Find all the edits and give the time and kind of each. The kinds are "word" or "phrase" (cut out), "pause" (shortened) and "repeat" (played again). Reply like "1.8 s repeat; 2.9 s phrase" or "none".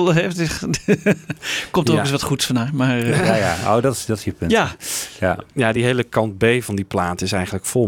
none